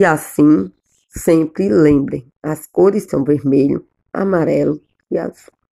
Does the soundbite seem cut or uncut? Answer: cut